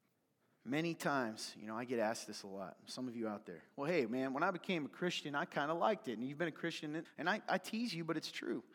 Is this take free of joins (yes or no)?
no